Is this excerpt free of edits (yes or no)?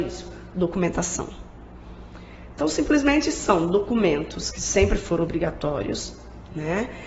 yes